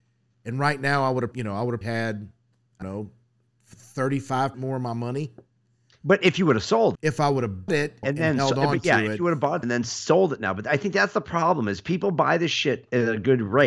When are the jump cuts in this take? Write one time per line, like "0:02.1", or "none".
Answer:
0:01.3
0:01.8
0:02.8
0:04.5
0:06.9
0:07.7
0:08.0
0:09.6